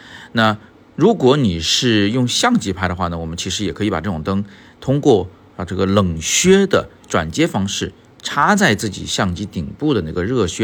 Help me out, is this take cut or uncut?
uncut